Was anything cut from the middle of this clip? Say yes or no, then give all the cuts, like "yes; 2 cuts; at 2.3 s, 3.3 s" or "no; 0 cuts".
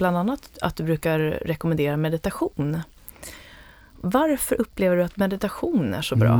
no; 0 cuts